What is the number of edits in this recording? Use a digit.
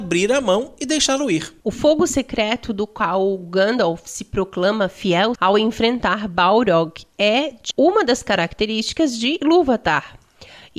3